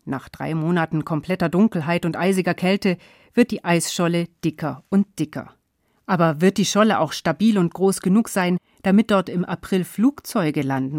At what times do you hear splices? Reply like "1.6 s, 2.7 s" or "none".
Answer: none